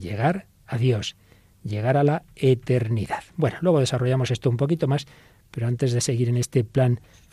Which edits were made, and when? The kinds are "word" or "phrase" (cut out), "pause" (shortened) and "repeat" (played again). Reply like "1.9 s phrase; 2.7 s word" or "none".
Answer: none